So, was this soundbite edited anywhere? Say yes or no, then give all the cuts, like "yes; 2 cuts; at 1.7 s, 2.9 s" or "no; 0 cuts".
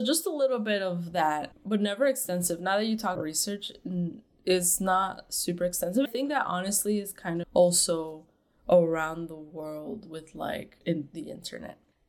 yes; 4 cuts; at 3.2 s, 6.1 s, 7.4 s, 10.8 s